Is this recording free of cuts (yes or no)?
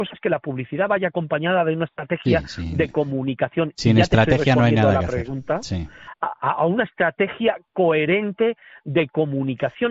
yes